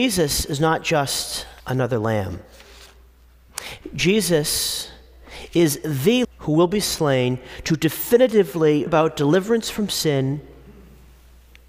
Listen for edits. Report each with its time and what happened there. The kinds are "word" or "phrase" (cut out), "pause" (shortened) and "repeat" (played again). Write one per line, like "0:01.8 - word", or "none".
0:01.6 - pause
0:06.2 - word
0:08.9 - word